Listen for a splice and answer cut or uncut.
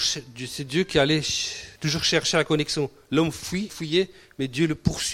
cut